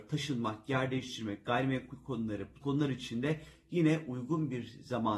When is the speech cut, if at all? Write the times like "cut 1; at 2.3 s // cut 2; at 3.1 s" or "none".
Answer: cut 1; at 2.6 s